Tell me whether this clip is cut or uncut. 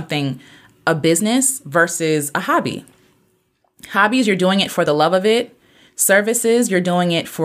uncut